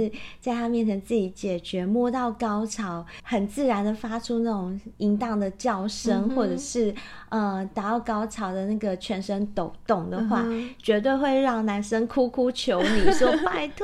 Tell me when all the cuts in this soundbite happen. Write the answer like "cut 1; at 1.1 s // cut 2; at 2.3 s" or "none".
cut 1; at 4.9 s